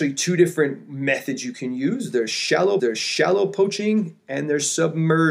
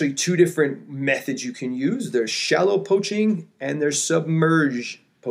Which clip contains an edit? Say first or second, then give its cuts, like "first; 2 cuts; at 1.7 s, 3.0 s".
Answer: first; 1 cut; at 2.8 s